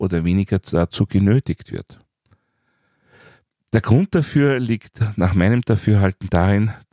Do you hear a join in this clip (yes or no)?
no